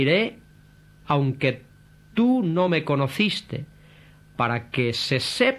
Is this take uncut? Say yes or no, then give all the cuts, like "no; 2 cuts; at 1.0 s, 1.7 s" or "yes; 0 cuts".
yes; 0 cuts